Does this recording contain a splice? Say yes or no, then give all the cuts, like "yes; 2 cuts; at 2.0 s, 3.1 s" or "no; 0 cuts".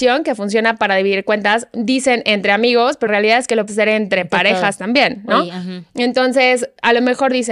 yes; 2 cuts; at 3.1 s, 3.7 s